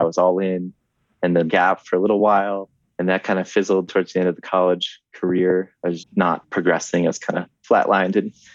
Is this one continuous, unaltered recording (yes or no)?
no